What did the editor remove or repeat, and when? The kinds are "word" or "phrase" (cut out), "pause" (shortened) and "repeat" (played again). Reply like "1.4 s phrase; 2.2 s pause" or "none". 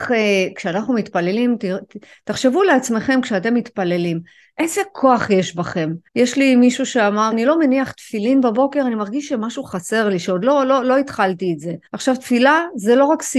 6.1 s pause; 7.3 s phrase; 11.9 s pause